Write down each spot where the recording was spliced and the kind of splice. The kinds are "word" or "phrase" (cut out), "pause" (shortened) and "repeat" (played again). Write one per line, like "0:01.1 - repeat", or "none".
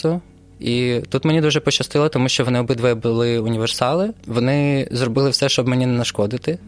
none